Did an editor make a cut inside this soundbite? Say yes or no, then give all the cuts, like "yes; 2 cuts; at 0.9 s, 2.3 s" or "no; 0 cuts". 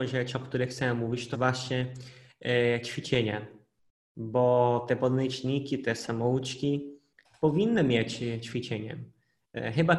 yes; 1 cut; at 1.3 s